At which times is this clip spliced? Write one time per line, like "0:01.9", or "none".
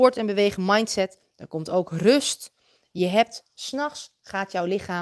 none